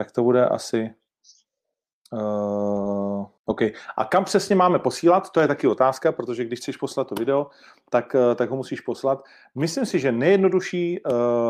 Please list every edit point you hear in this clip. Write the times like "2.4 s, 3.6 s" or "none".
3.4 s